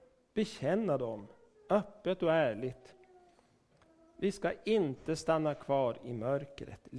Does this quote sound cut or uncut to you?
uncut